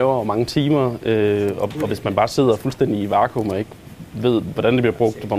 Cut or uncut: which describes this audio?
uncut